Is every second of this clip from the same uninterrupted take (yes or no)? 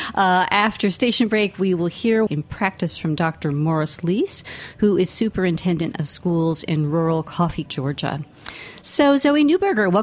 no